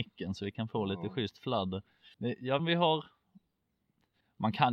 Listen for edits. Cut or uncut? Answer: cut